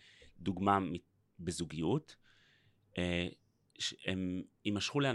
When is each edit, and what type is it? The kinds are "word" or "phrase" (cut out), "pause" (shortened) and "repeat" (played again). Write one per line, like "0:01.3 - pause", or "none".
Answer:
none